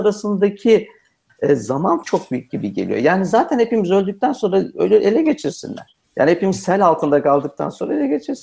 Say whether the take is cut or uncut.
cut